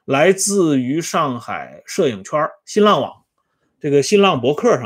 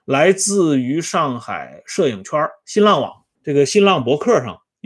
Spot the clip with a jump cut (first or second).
second